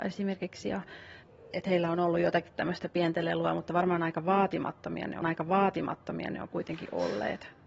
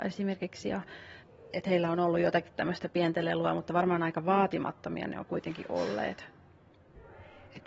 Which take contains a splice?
first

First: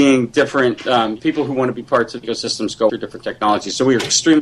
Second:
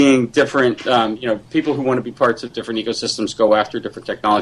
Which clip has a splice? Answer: first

